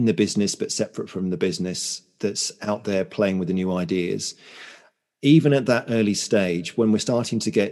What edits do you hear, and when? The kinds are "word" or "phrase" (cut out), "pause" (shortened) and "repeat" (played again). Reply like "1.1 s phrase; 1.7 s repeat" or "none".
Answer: none